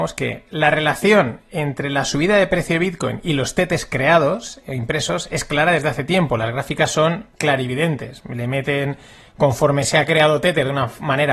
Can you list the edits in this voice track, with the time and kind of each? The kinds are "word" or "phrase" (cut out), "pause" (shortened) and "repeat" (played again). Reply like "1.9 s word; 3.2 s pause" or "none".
7.3 s pause